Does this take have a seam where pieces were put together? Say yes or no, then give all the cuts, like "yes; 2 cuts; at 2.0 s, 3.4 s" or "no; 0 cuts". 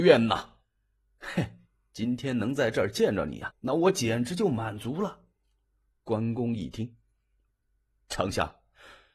yes; 1 cut; at 3.5 s